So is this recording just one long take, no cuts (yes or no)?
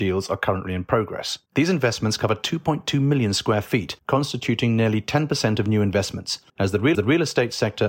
no